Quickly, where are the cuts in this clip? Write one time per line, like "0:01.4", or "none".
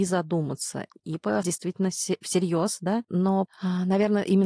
0:01.0
0:01.4
0:03.5